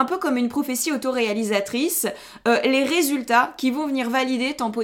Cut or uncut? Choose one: uncut